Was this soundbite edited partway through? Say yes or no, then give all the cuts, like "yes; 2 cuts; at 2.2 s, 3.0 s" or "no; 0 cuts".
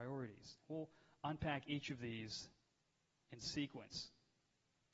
no; 0 cuts